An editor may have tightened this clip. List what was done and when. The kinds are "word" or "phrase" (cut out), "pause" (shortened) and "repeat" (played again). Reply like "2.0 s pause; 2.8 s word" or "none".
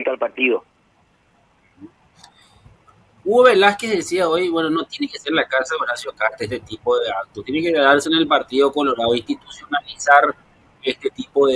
none